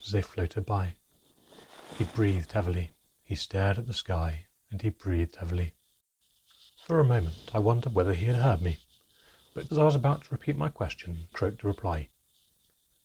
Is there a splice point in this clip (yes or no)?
yes